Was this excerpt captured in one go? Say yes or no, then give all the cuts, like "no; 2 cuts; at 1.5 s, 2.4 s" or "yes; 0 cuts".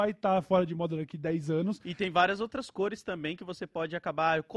yes; 0 cuts